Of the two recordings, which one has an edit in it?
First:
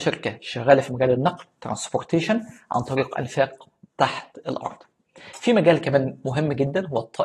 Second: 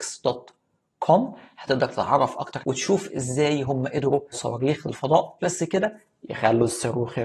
second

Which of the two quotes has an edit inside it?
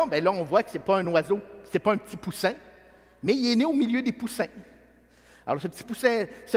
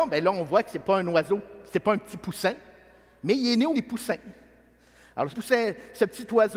second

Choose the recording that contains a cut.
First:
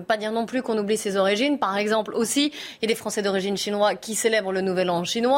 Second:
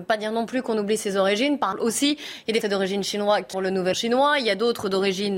second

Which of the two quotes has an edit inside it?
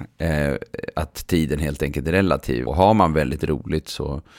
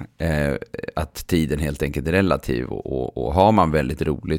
first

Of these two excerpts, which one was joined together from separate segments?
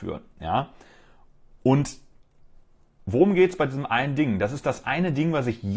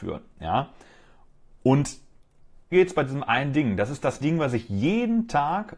second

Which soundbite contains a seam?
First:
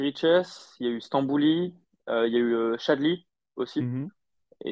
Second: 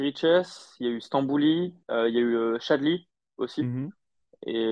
second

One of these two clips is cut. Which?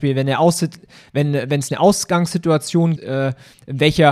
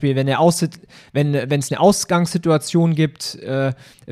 first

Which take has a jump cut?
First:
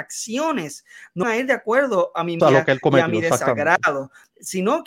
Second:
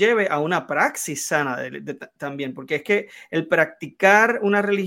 first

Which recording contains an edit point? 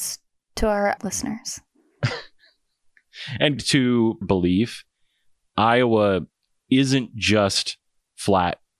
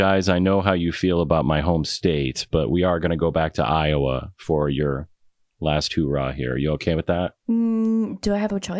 first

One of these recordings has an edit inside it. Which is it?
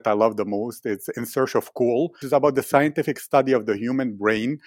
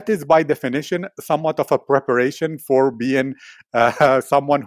first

